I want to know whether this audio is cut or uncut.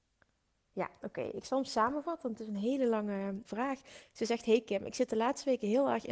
cut